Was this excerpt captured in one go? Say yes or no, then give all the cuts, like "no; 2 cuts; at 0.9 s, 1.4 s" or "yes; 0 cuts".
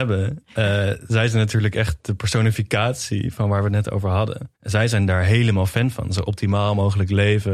no; 1 cut; at 4.6 s